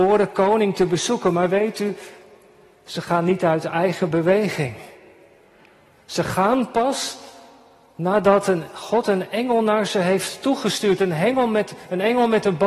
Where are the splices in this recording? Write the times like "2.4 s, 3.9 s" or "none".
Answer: none